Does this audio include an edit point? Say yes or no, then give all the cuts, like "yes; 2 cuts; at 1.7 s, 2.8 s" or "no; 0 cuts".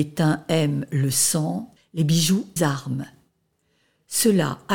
yes; 2 cuts; at 1.8 s, 2.6 s